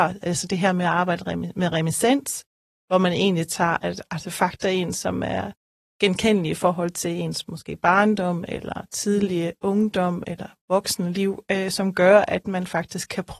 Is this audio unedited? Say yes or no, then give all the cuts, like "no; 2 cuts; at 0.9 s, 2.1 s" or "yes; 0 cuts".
yes; 0 cuts